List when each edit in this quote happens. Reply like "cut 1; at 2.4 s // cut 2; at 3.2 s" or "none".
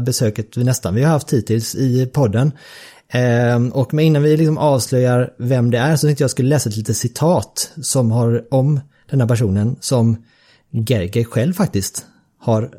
none